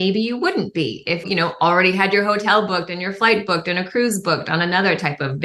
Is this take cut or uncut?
cut